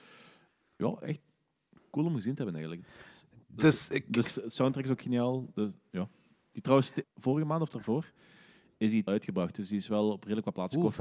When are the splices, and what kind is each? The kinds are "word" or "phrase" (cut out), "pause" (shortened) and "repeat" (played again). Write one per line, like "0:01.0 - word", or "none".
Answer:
0:04.2 - word
0:07.0 - word
0:07.7 - word
0:09.1 - phrase

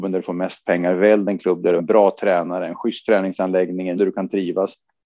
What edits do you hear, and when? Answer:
0:01.8 - phrase
0:04.0 - word

